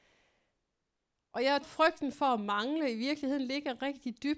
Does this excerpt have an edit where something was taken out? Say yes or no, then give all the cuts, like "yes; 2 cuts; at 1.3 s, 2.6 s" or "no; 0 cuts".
yes; 1 cut; at 1.6 s